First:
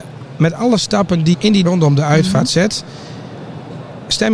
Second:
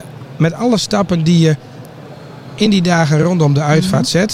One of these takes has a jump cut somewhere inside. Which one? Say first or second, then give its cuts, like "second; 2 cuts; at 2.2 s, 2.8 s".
first; 2 cuts; at 1.3 s, 1.6 s